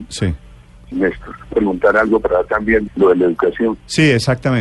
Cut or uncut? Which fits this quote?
cut